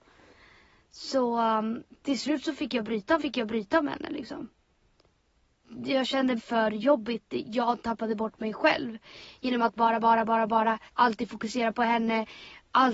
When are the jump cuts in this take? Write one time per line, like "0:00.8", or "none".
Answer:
0:03.2
0:06.4
0:09.8
0:10.9